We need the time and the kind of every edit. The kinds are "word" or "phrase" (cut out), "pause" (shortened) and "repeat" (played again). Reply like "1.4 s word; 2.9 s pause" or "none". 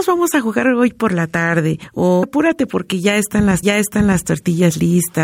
2.2 s word; 3.6 s repeat